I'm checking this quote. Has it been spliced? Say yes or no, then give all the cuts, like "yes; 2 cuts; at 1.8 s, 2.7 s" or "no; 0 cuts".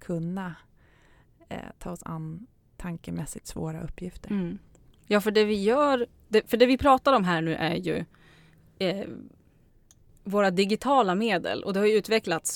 yes; 1 cut; at 2.7 s